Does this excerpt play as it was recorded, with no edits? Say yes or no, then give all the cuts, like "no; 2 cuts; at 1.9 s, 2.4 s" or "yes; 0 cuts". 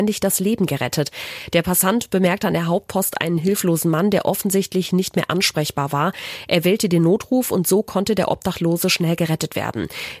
yes; 0 cuts